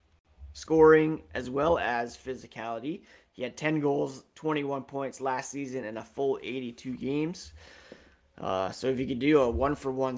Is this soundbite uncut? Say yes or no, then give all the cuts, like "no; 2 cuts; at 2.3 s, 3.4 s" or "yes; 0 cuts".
yes; 0 cuts